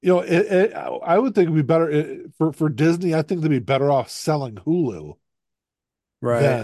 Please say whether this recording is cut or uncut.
uncut